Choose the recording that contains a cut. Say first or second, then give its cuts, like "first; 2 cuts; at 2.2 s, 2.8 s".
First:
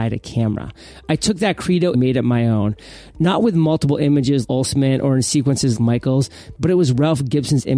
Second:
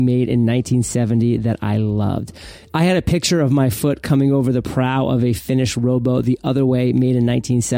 first; 3 cuts; at 1.9 s, 4.4 s, 5.8 s